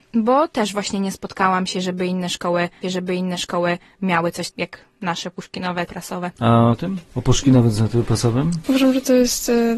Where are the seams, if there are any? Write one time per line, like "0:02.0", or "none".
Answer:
0:02.8
0:04.5
0:05.9
0:06.7